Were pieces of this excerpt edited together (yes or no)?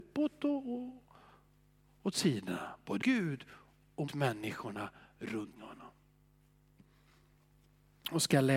yes